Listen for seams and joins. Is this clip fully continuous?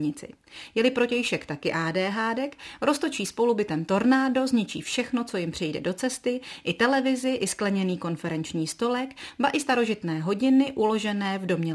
yes; 0 cuts

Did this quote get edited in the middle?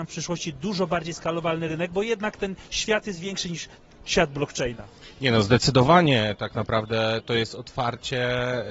no; 0 cuts

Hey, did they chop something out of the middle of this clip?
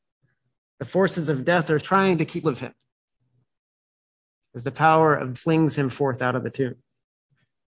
yes; 3 cuts; at 1.8 s, 2.4 s, 5.3 s

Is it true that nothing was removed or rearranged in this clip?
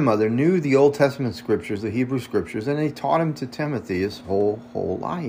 yes; 0 cuts

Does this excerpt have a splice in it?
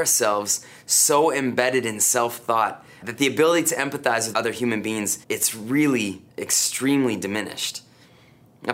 yes; 4 cuts; at 3.0 s, 4.3 s, 5.2 s, 6.3 s

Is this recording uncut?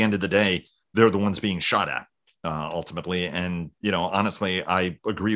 yes; 0 cuts

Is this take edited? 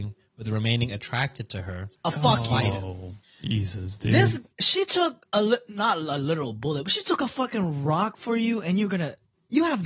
yes; 1 cut; at 4.5 s

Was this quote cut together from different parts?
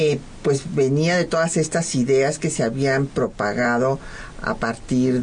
no; 0 cuts

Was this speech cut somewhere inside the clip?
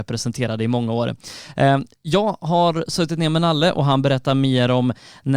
no; 0 cuts

